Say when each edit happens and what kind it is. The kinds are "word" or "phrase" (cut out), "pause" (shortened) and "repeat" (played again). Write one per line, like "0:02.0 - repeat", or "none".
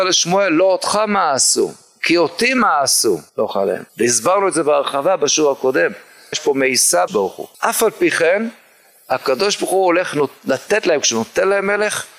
0:03.3 - pause
0:03.9 - pause
0:06.3 - word
0:07.1 - word
0:07.5 - pause